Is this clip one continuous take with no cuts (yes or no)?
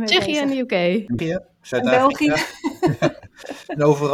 no